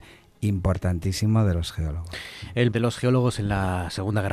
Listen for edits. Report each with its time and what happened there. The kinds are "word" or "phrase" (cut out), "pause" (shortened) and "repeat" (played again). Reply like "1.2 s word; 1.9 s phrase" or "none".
2.7 s word